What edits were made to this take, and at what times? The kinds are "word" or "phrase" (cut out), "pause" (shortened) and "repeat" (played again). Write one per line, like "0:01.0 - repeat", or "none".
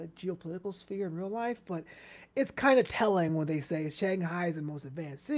none